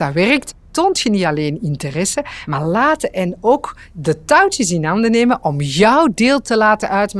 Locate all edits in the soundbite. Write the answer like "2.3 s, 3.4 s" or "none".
none